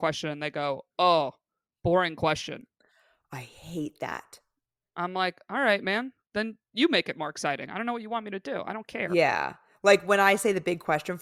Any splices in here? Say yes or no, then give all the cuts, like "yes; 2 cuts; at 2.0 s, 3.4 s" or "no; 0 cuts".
no; 0 cuts